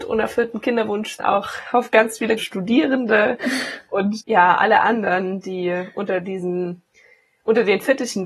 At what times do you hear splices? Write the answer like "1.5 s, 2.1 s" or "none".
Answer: 1.2 s, 2.4 s, 4.2 s